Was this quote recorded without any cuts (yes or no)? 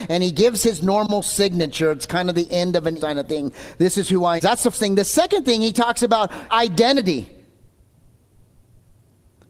no